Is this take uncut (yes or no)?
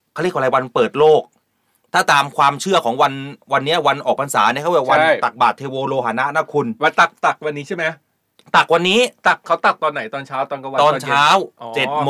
yes